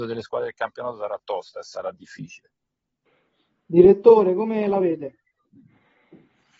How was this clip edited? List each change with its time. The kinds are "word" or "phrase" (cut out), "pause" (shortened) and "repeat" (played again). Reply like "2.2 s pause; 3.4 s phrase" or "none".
none